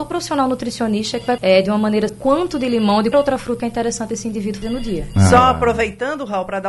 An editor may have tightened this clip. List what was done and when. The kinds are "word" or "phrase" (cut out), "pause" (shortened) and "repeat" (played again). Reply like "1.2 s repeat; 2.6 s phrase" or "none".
1.4 s word; 2.1 s word; 3.1 s word; 3.6 s word; 4.6 s word